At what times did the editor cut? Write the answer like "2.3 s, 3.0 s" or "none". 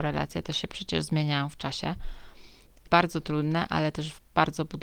2.9 s